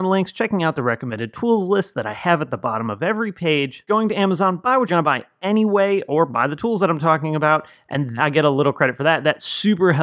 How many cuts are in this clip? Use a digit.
2